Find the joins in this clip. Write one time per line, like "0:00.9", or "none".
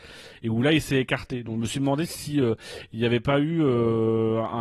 none